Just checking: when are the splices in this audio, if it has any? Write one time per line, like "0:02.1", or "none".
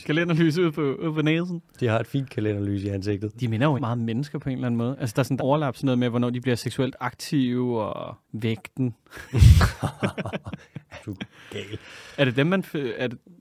0:03.8
0:05.4
0:08.2
0:11.0